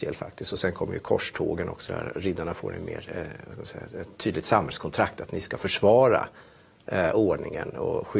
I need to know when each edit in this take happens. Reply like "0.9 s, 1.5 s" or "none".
1.9 s